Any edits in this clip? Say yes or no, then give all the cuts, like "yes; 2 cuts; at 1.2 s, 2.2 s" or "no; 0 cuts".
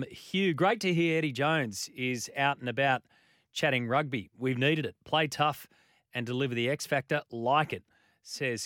no; 0 cuts